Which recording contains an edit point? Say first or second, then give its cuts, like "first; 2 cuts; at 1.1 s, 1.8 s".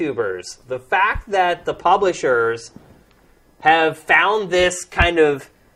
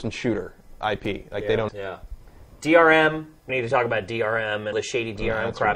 second; 3 cuts; at 1.7 s, 3.5 s, 4.7 s